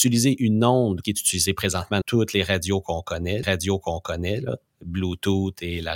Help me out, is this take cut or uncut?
cut